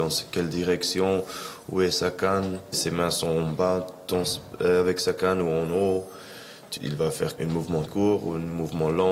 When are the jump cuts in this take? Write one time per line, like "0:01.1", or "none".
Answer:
0:02.7
0:06.8
0:07.4
0:07.8